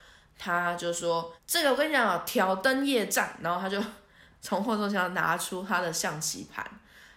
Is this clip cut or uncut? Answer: cut